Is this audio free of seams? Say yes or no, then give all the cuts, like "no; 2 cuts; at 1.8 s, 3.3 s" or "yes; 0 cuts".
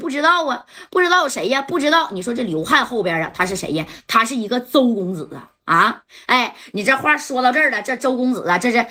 yes; 0 cuts